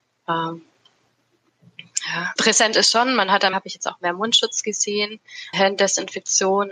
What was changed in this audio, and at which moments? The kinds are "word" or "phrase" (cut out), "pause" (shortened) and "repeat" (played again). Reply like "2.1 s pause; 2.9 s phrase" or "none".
2.4 s word; 3.5 s word; 5.5 s word